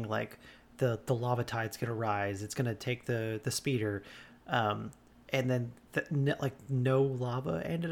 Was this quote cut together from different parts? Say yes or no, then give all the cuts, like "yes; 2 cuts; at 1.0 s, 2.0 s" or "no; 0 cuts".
no; 0 cuts